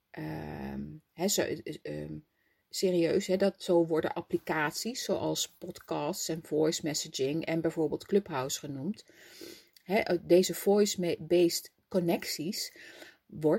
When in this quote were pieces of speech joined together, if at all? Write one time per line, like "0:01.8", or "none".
none